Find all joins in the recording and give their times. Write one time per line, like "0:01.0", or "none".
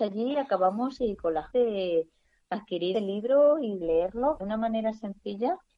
0:01.0
0:01.5
0:02.9
0:03.8
0:04.4